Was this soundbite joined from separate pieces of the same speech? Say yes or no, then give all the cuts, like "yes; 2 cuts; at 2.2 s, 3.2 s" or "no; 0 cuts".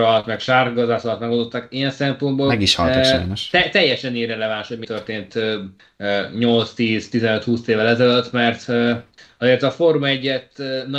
no; 0 cuts